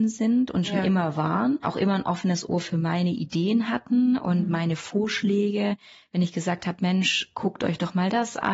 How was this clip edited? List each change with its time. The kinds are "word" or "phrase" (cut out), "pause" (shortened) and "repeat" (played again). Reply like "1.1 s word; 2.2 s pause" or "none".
none